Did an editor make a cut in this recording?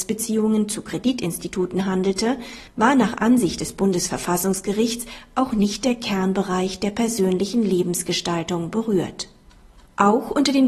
yes; 1 cut; at 2.7 s

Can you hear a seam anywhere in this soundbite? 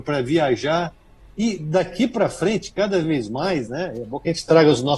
no; 0 cuts

